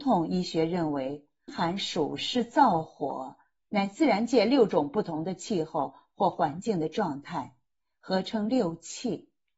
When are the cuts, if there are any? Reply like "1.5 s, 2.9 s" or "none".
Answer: 1.5 s